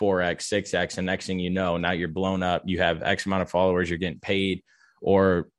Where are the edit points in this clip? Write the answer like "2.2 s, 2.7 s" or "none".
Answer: none